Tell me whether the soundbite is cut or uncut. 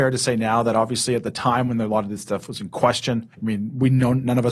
cut